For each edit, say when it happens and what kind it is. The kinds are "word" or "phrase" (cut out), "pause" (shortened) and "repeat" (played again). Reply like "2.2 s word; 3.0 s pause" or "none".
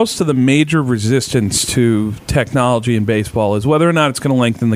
none